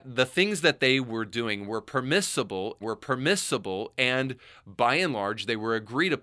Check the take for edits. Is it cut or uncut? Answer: cut